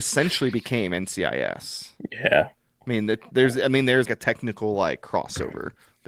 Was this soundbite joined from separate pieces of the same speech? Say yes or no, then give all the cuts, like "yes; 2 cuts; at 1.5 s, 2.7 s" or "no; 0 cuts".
yes; 1 cut; at 4.1 s